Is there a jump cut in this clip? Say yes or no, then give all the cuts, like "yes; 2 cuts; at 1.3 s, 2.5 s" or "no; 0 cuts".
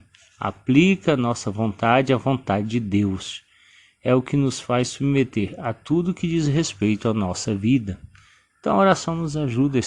no; 0 cuts